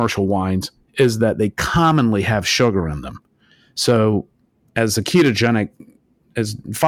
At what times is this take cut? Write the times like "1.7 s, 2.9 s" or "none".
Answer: none